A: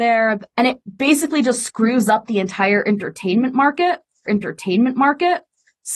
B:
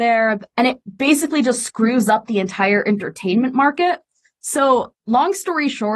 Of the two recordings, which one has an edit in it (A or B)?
A